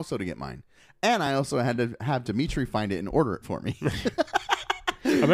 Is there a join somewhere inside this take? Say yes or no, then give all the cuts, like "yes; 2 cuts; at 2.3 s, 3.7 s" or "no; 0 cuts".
no; 0 cuts